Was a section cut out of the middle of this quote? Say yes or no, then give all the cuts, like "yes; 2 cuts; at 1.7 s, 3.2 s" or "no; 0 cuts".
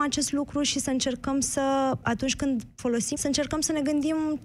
yes; 2 cuts; at 2.0 s, 3.1 s